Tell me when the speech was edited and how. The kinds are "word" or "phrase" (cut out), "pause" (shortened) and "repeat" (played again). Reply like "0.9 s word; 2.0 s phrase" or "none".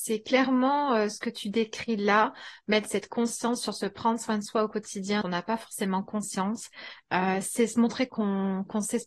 5.2 s word